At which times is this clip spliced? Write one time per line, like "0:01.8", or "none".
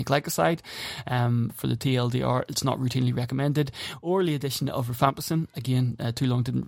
none